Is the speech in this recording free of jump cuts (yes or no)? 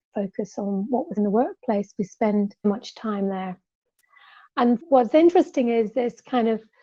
no